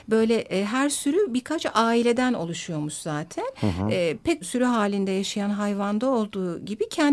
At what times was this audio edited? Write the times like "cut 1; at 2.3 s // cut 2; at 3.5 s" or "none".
cut 1; at 4.4 s